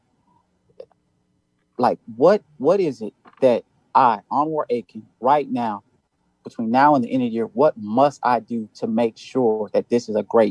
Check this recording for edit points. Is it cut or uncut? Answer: uncut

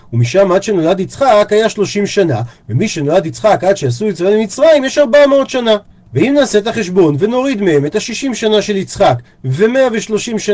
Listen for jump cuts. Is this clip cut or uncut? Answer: uncut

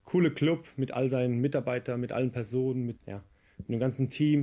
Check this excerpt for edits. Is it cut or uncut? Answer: cut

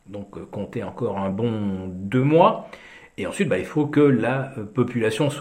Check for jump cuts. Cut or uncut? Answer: uncut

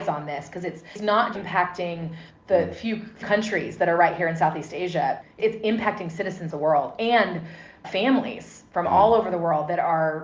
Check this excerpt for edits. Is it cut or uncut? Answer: cut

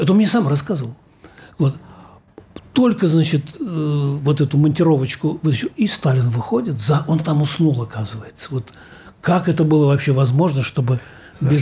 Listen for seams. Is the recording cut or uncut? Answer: uncut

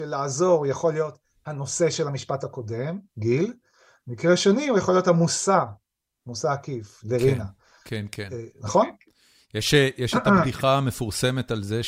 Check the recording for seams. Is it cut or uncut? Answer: cut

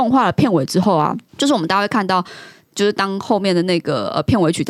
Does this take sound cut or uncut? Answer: cut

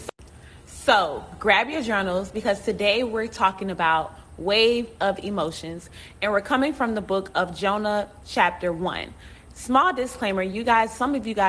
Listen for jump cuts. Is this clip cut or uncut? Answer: uncut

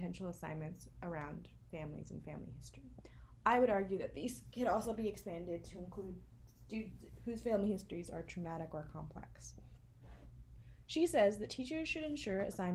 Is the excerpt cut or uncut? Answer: uncut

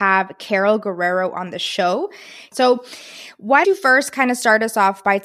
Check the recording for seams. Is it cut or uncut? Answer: cut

